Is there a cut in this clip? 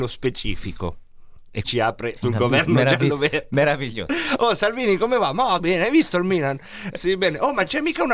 yes; 4 cuts; at 1.6 s, 2.2 s, 5.6 s, 7.0 s

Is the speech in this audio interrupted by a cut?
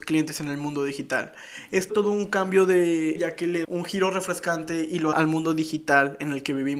yes; 4 cuts; at 1.9 s, 3.2 s, 3.6 s, 5.1 s

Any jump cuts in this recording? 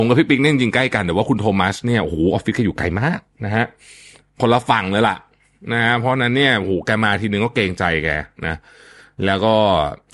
no; 0 cuts

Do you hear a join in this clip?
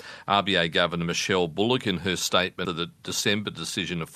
yes; 1 cut; at 2.6 s

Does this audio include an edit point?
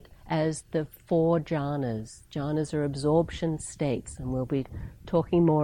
no; 0 cuts

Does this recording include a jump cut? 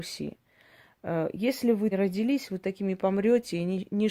yes; 1 cut; at 1.9 s

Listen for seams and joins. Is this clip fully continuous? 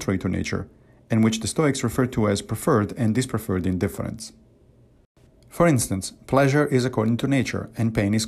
yes; 0 cuts

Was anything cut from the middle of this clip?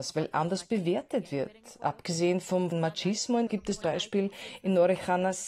yes; 3 cuts; at 2.7 s, 3.5 s, 3.8 s

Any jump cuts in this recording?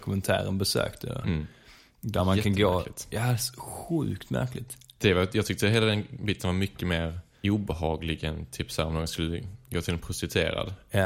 no; 0 cuts

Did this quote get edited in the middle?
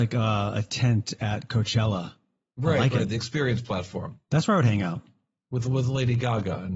no; 0 cuts

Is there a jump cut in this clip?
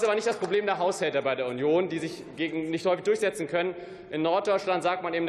no; 0 cuts

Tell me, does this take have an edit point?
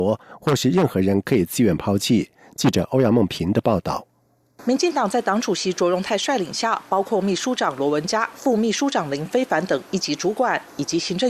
no; 0 cuts

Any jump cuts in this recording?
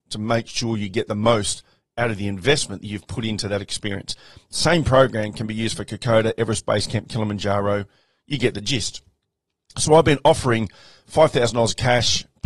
no; 0 cuts

